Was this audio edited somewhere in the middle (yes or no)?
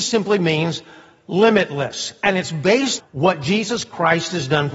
yes